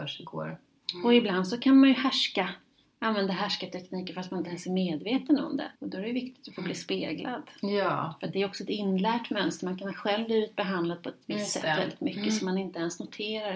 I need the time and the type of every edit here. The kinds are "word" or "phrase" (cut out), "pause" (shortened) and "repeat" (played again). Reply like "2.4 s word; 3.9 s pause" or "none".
5.8 s pause